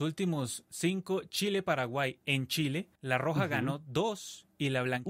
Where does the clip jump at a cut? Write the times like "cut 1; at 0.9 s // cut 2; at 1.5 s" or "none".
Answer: cut 1; at 3.0 s